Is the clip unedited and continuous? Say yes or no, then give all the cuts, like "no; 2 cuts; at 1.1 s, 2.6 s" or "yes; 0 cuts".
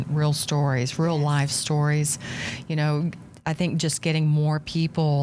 yes; 0 cuts